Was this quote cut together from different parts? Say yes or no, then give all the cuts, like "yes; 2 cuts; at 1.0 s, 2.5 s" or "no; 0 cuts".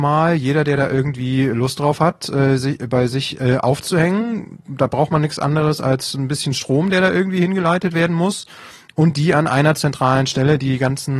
no; 0 cuts